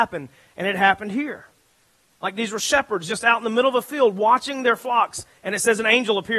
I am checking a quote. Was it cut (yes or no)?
no